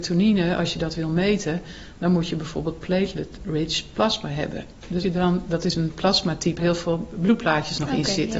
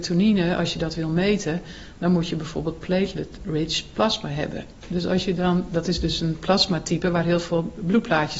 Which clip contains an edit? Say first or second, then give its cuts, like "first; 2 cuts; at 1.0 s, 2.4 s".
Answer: first; 3 cuts; at 5.0 s, 5.7 s, 6.6 s